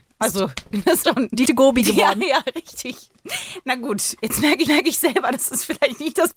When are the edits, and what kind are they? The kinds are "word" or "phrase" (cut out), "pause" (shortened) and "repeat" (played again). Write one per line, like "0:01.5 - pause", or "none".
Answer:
0:01.0 - word
0:01.5 - word
0:04.7 - repeat

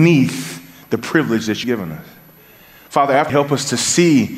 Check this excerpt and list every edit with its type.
0:01.6 - word
0:03.3 - word

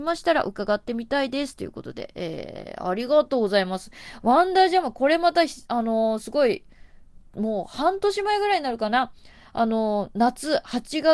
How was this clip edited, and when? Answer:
none

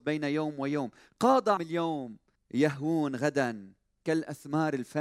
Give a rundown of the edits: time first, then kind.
0:01.6 - word
0:02.4 - pause

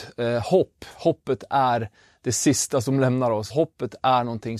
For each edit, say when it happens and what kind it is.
0:03.5 - word

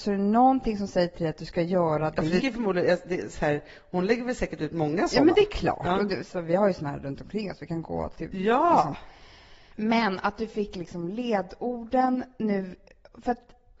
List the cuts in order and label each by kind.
0:02.4 - word

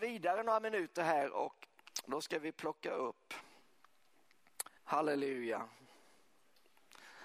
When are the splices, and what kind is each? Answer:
0:04.8 - pause

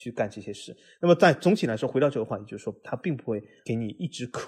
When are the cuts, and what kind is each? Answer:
none

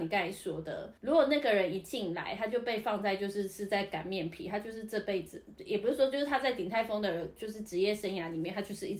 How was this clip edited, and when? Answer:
0:01.0 - pause

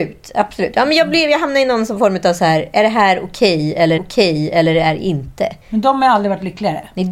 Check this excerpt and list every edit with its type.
0:04.0 - repeat
0:05.6 - pause

